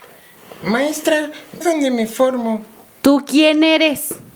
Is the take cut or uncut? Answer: cut